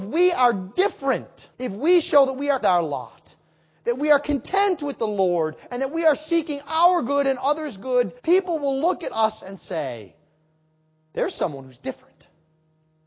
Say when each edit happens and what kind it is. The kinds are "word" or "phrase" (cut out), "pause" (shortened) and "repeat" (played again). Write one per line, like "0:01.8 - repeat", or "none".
0:01.5 - pause
0:02.6 - phrase
0:08.2 - pause